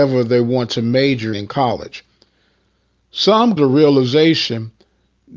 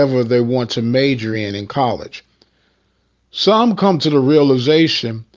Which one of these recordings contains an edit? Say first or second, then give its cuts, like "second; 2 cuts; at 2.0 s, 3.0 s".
first; 2 cuts; at 1.3 s, 3.6 s